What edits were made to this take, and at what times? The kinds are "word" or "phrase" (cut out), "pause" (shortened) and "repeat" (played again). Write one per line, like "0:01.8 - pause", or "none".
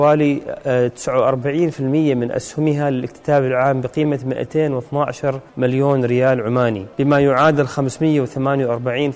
0:05.5 - pause
0:06.9 - pause